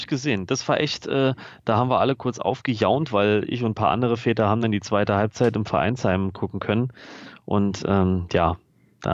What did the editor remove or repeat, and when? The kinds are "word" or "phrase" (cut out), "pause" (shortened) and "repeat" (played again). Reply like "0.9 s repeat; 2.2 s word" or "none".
none